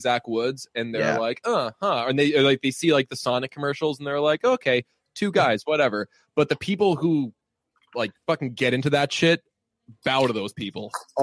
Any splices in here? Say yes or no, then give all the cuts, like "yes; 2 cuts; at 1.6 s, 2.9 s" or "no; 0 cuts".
no; 0 cuts